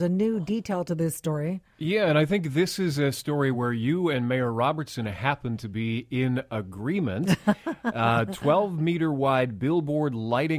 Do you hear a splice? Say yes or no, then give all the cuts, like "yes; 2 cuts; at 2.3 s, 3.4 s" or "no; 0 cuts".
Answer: no; 0 cuts